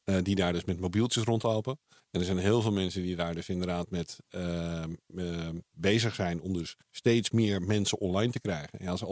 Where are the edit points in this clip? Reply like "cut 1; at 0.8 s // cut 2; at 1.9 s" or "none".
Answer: cut 1; at 2.0 s // cut 2; at 6.8 s